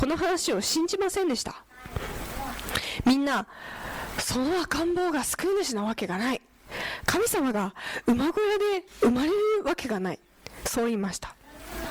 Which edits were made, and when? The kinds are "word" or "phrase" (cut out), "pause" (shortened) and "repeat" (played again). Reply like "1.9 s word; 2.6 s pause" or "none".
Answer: 8.9 s pause